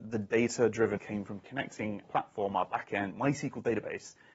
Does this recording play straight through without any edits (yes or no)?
no